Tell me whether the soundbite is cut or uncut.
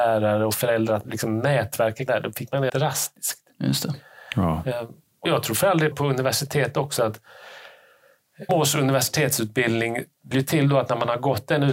cut